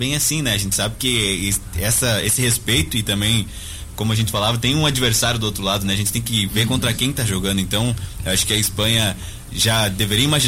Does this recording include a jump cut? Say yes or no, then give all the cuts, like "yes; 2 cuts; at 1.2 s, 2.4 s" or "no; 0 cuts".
yes; 1 cut; at 3.9 s